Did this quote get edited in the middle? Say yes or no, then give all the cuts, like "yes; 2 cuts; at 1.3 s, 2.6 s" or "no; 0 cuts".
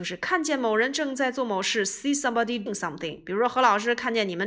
yes; 1 cut; at 2.7 s